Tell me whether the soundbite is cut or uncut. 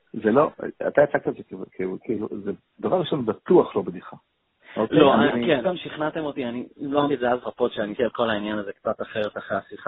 cut